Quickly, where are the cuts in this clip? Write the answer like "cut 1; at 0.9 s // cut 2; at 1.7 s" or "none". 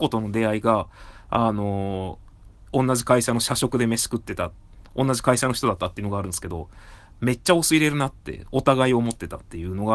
none

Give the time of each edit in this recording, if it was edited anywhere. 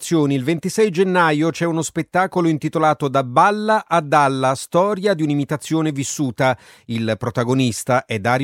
none

